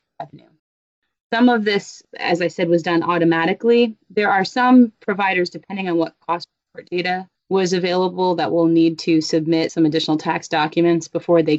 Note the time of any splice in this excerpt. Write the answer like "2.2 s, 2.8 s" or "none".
none

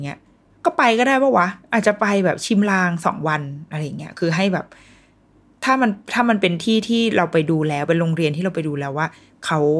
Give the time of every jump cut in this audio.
none

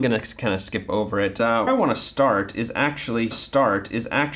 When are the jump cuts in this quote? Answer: 1.7 s, 3.3 s

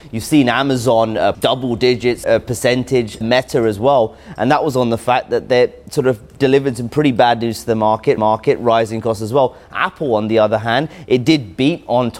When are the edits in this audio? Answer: 1.3 s, 2.2 s, 3.2 s, 8.2 s

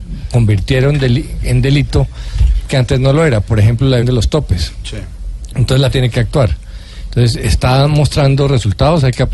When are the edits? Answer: 2.7 s, 4.0 s, 5.9 s

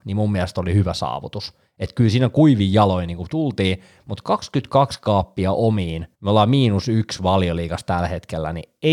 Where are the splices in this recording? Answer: 6.1 s

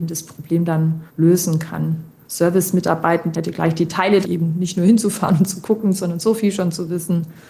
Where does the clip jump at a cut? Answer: 1.1 s, 4.2 s

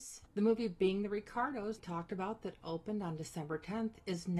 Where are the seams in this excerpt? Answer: 1.8 s

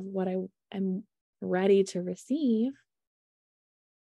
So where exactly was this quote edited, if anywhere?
none

